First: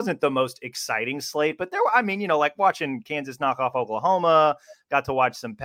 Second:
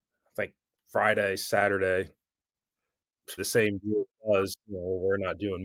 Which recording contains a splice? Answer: second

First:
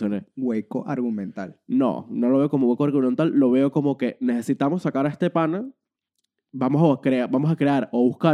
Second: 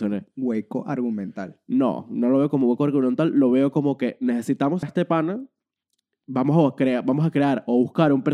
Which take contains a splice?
second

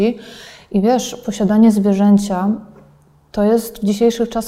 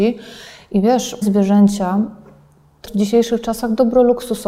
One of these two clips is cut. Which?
second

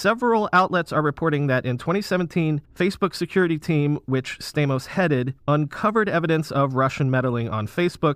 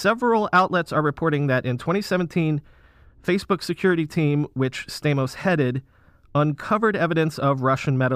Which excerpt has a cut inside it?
first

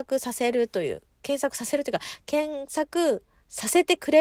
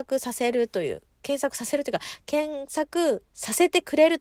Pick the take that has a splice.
second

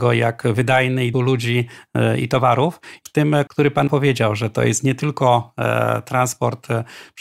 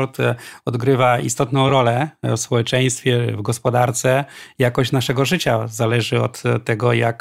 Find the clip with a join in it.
first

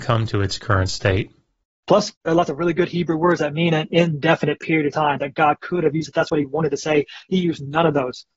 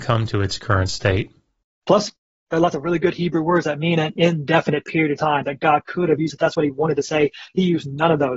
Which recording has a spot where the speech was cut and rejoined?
first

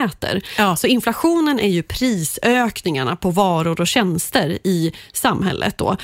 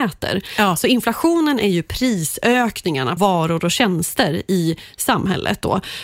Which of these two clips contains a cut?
second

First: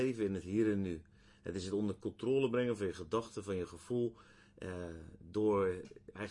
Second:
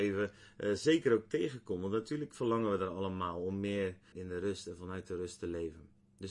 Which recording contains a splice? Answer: second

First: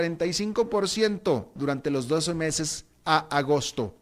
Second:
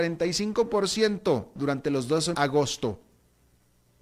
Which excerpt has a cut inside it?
second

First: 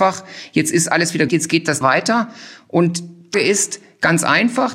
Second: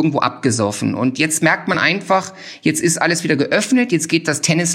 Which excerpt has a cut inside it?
first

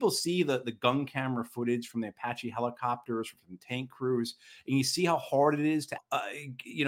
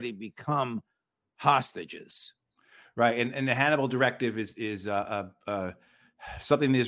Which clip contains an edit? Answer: first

